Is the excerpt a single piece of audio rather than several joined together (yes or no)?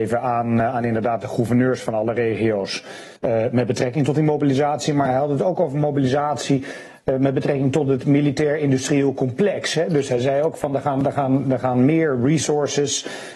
no